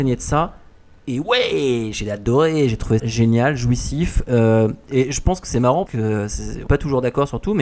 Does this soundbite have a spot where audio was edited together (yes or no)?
yes